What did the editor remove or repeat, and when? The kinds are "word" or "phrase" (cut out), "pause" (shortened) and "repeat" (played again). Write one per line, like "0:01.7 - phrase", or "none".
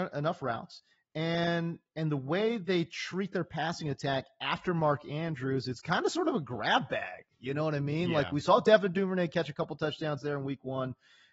none